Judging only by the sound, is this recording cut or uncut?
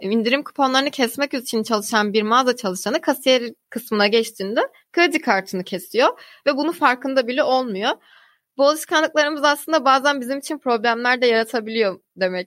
uncut